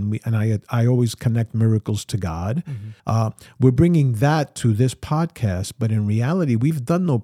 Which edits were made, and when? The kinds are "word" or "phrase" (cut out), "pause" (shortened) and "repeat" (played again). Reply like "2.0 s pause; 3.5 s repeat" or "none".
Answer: 3.0 s pause